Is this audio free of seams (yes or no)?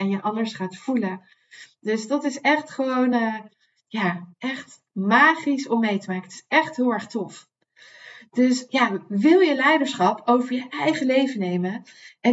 yes